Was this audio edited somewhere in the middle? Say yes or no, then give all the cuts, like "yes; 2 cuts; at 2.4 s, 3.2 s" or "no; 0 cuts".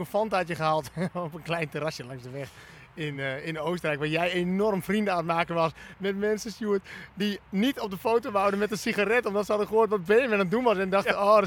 no; 0 cuts